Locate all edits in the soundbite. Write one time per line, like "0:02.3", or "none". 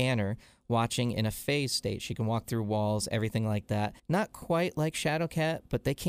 0:04.0